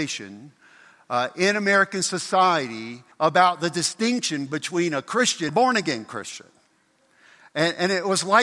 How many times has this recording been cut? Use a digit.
2